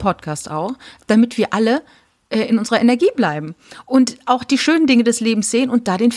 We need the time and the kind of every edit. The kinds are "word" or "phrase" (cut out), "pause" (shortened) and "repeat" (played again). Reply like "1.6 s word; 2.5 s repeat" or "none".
none